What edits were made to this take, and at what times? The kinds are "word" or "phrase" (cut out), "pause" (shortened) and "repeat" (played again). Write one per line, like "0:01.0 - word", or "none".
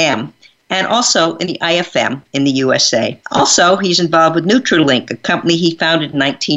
0:03.2 - pause